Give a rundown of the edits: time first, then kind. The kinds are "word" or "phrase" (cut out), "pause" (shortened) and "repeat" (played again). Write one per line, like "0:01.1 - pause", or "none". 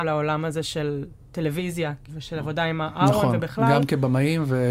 none